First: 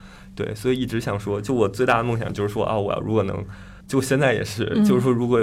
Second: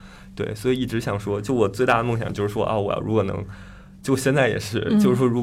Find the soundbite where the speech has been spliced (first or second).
first